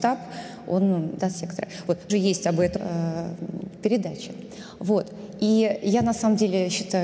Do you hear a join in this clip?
yes; 3 cuts; at 1.2 s, 2.1 s, 2.8 s

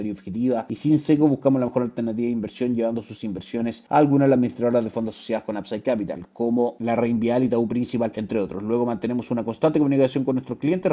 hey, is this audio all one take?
yes; 0 cuts

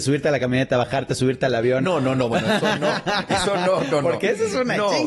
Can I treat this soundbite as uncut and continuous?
yes; 0 cuts

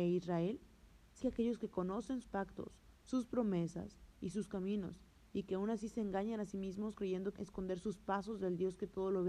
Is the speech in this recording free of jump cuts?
no; 3 cuts; at 1.2 s, 2.2 s, 7.4 s

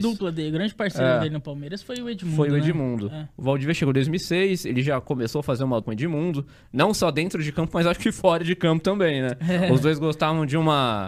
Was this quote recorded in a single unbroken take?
no; 1 cut; at 5.8 s

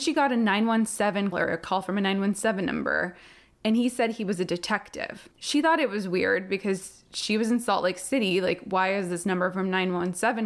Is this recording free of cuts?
no; 1 cut; at 1.3 s

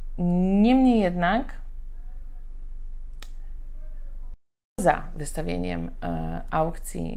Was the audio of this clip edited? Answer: no; 0 cuts

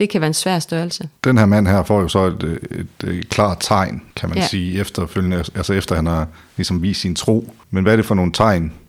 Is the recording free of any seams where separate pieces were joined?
yes; 0 cuts

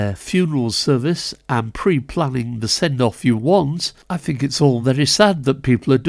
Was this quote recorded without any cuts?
yes; 0 cuts

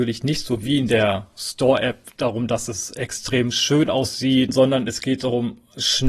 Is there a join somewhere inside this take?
no; 0 cuts

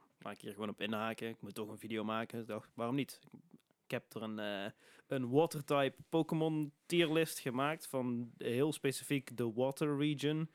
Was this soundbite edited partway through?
no; 0 cuts

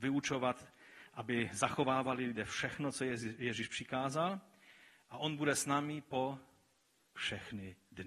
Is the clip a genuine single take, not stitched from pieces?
yes; 0 cuts

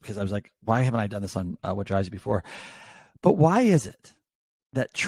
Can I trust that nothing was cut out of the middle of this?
yes; 0 cuts

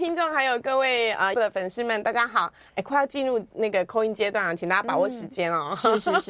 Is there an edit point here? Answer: yes; 1 cut; at 1.3 s

